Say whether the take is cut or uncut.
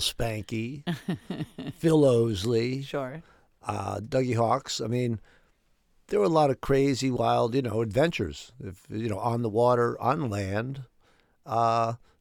uncut